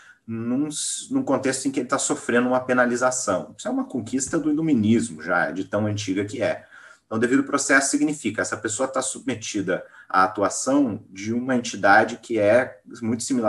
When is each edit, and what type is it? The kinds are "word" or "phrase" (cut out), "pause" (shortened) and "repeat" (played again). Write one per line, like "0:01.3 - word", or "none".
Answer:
none